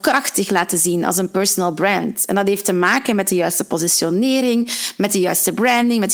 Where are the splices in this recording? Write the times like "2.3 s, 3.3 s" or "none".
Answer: none